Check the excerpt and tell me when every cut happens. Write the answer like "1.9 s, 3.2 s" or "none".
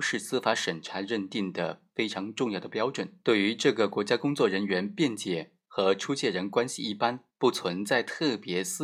3.2 s, 7.3 s

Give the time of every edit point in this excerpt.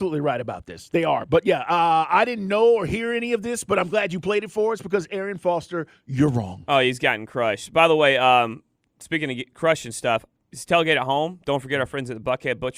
none

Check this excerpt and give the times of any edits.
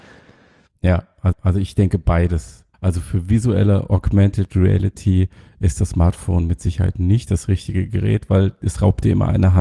1.3 s, 2.7 s

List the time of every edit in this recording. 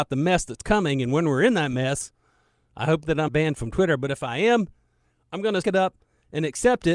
3.3 s, 5.6 s

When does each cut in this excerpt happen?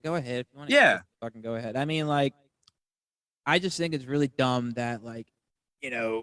none

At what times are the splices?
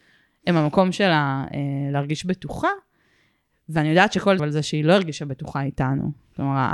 4.4 s

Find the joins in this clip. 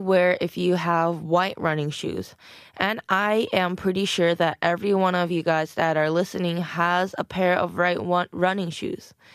none

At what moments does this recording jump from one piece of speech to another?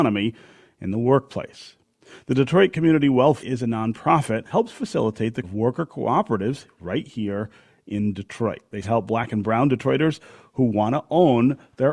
3.4 s, 4.5 s, 5.4 s, 8.8 s

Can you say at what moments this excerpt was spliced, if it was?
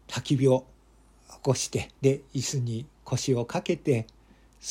2.0 s

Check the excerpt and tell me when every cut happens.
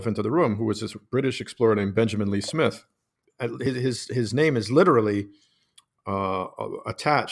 none

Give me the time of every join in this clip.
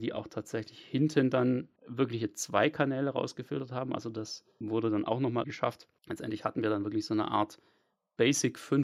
1.8 s, 4.6 s, 5.4 s, 6.0 s

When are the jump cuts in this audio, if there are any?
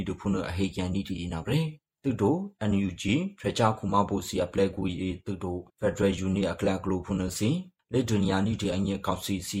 5.7 s

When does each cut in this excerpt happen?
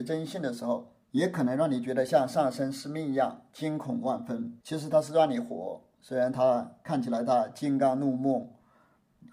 1.0 s, 4.6 s

